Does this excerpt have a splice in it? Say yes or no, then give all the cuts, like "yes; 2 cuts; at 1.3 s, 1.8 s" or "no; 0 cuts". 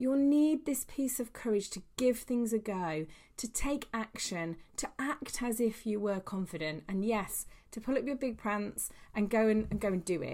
no; 0 cuts